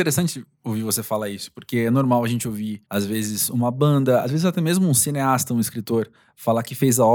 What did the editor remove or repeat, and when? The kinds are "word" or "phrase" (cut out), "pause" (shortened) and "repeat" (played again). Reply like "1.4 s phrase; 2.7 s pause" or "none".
2.8 s pause